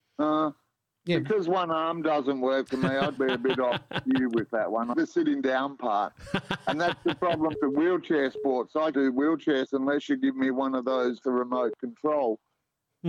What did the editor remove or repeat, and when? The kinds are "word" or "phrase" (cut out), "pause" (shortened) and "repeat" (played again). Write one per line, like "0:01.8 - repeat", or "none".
0:03.2 - word
0:04.9 - word
0:07.5 - word
0:08.9 - word
0:09.7 - word
0:11.2 - word